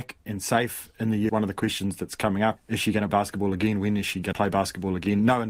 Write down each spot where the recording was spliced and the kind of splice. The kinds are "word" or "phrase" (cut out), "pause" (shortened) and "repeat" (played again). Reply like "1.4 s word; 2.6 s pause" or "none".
1.3 s word; 2.6 s word; 3.1 s word; 4.3 s word